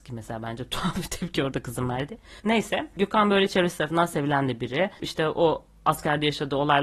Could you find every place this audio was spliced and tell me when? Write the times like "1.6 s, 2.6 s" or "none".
2.4 s